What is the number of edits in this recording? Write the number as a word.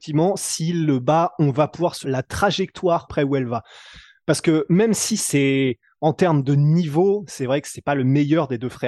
two